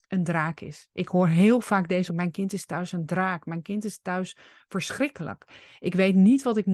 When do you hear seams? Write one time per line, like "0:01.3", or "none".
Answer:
0:02.1